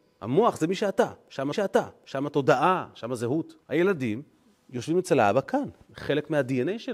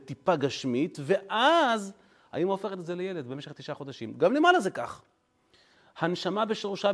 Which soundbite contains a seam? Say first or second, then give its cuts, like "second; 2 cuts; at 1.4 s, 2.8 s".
first; 2 cuts; at 1.5 s, 3.6 s